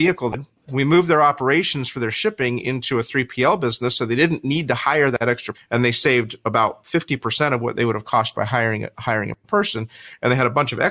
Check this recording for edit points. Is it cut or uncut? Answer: cut